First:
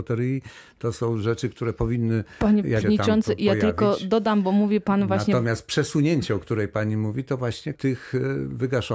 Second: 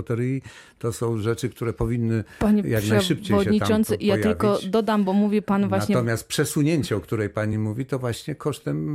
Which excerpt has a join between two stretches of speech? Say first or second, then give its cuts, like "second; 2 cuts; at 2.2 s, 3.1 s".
first; 2 cuts; at 2.8 s, 7.7 s